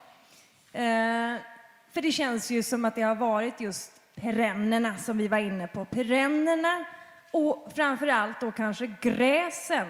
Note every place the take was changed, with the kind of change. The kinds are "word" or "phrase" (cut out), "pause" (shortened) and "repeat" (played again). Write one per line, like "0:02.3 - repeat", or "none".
none